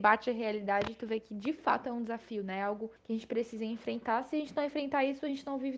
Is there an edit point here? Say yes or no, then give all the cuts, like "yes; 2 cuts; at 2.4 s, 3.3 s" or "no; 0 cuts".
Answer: yes; 1 cut; at 3.0 s